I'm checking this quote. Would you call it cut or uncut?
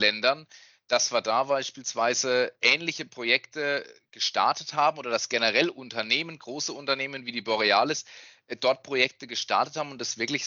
uncut